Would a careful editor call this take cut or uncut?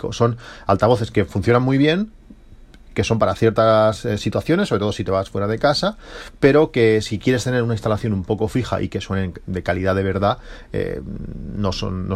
uncut